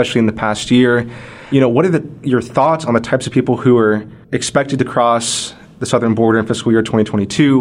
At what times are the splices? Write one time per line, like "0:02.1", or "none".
0:04.2

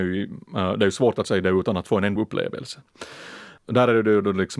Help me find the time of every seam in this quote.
0:01.2
0:02.2

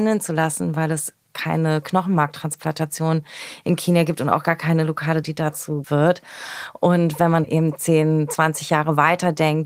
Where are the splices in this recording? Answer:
0:05.2
0:05.8
0:07.4

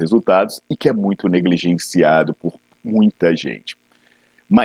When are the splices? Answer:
none

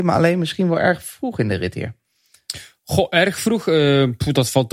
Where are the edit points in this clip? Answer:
none

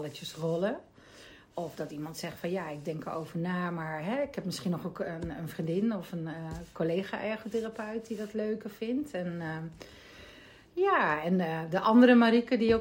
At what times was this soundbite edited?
none

